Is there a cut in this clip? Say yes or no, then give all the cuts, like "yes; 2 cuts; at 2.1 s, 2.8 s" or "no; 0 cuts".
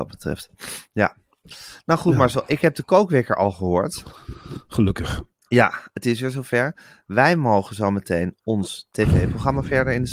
no; 0 cuts